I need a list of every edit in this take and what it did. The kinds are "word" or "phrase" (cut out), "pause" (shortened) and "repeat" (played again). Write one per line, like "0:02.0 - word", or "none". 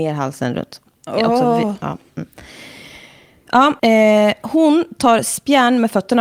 0:03.8 - pause